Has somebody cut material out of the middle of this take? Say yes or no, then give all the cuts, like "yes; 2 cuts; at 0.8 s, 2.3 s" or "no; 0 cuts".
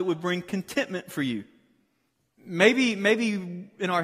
no; 0 cuts